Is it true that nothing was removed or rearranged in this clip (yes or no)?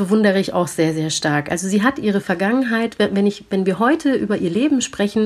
yes